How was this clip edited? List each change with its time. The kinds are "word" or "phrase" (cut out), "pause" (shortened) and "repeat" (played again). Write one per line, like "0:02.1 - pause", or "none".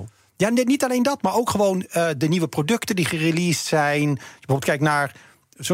none